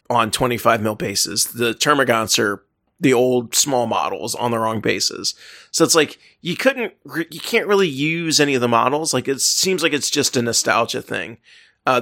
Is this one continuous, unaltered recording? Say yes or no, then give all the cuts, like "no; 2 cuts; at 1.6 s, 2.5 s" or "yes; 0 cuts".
yes; 0 cuts